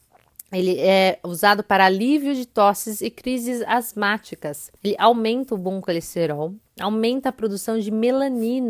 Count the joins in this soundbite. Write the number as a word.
one